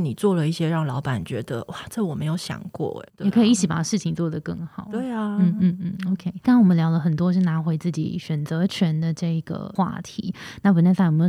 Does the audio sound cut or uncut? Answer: cut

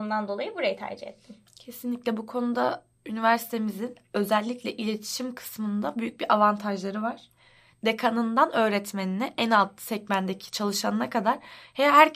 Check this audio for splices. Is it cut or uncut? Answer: uncut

